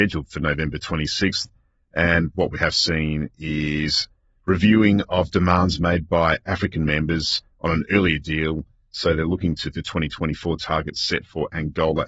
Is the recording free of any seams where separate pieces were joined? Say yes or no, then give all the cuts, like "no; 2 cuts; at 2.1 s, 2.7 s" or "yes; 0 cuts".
no; 1 cut; at 9.7 s